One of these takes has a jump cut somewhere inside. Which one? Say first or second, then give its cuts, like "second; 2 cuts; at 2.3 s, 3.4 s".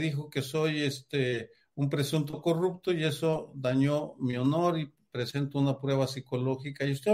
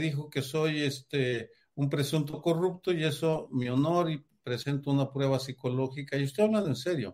second; 1 cut; at 3.5 s